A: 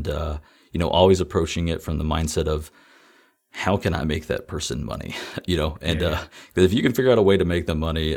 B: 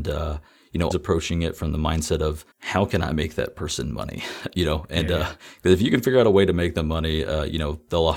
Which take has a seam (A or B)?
B